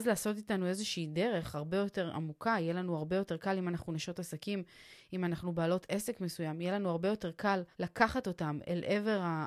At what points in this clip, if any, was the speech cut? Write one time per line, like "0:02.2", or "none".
0:07.7